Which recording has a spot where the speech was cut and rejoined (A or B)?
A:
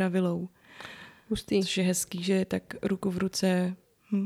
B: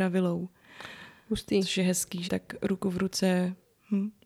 B